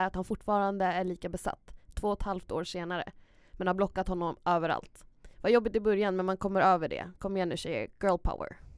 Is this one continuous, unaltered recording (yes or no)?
no